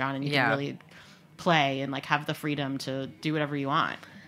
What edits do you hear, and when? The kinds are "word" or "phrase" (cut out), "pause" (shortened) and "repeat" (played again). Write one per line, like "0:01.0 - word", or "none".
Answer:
none

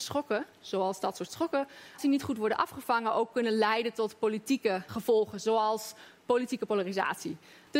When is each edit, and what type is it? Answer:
0:02.0 - word
0:04.9 - word

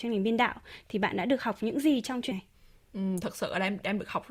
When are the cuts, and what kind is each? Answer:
0:02.3 - word

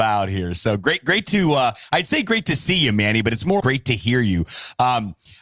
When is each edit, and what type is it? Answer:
0:03.6 - word

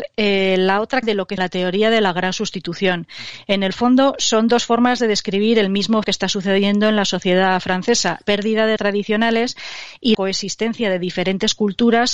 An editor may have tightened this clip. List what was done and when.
0:01.0 - phrase
0:01.4 - phrase
0:06.0 - word
0:08.2 - word
0:08.8 - word
0:10.1 - word

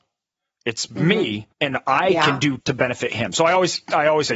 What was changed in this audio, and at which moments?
0:01.5 - pause
0:02.6 - word

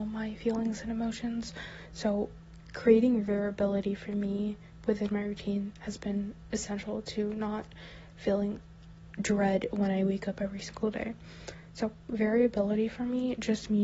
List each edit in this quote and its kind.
none

